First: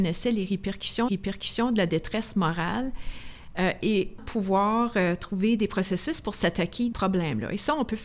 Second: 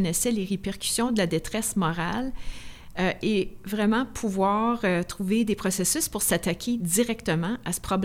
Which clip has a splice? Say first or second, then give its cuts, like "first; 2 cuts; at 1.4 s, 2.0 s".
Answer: first; 3 cuts; at 1.1 s, 4.2 s, 6.9 s